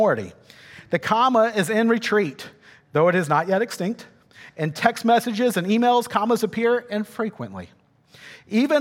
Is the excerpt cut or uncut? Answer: uncut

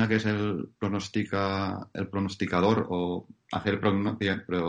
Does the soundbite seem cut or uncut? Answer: uncut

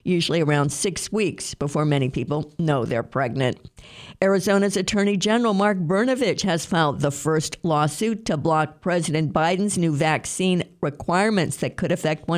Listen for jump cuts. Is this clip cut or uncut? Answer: uncut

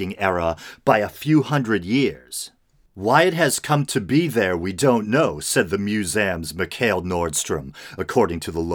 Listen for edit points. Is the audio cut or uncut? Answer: uncut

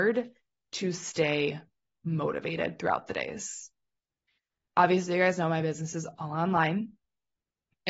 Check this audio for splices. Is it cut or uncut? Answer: uncut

